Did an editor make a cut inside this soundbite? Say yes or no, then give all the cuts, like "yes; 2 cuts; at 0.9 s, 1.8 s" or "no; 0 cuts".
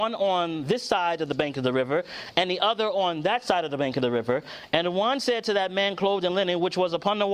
no; 0 cuts